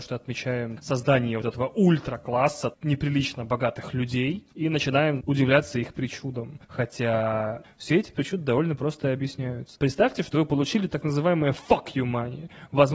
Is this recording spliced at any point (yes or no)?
no